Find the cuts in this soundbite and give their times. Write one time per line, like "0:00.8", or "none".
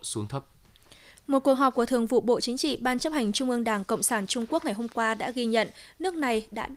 none

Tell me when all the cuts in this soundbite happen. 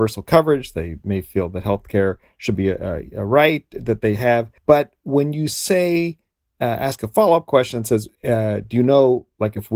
0:04.6
0:08.2

